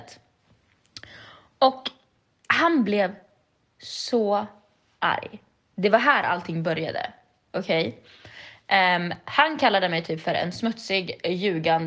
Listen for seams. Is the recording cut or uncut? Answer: uncut